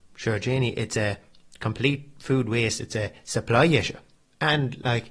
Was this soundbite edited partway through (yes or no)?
no